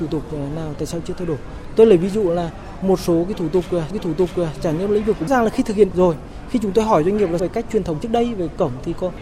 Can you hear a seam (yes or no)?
yes